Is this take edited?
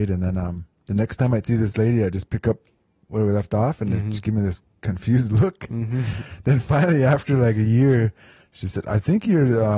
no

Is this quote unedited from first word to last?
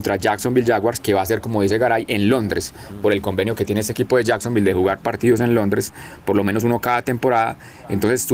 yes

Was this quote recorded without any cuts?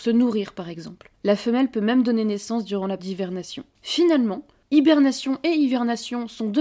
no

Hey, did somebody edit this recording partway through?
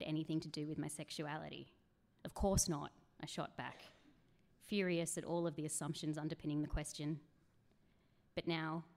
no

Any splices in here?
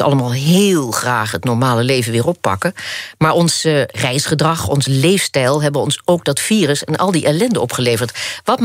no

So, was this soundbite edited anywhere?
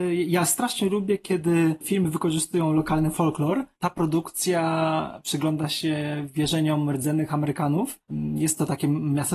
no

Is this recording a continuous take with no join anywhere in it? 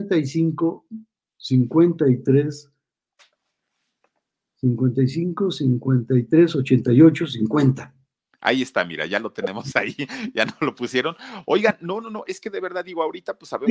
yes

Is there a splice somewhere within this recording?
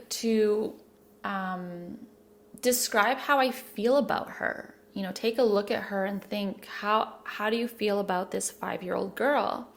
no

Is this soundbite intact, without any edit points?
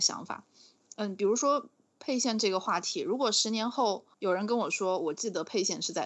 no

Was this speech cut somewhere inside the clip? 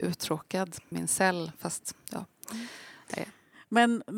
yes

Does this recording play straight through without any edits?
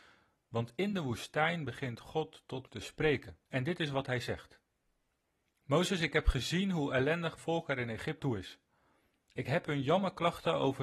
no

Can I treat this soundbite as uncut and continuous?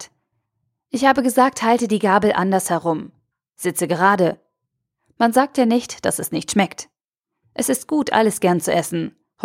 yes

